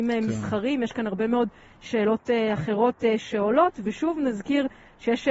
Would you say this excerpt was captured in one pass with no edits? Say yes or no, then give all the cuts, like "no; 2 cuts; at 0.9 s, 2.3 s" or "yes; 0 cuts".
yes; 0 cuts